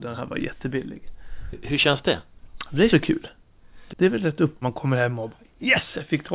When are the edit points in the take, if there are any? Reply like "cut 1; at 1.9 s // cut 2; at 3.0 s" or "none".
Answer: cut 1; at 2.9 s // cut 2; at 3.9 s // cut 3; at 4.6 s